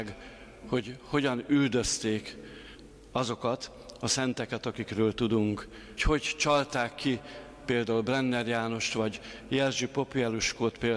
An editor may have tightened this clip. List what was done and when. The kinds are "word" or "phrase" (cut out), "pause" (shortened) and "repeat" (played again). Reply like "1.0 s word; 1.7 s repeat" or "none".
6.0 s word